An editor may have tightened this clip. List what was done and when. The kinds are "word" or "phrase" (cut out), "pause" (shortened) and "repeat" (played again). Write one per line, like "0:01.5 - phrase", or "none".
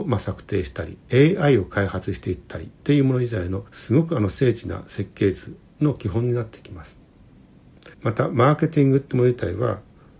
0:01.0 - pause
0:02.8 - pause
0:03.7 - pause
0:07.9 - pause